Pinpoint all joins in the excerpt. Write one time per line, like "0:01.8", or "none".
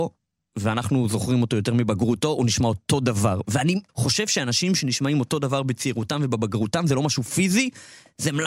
0:03.9